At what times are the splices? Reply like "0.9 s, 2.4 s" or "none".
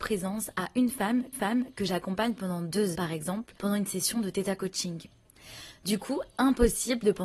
1.3 s, 2.9 s, 3.6 s